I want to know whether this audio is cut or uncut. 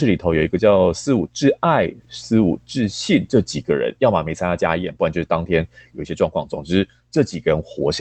cut